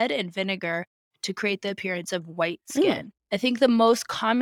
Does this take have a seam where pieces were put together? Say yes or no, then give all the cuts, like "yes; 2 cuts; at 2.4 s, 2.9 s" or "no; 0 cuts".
no; 0 cuts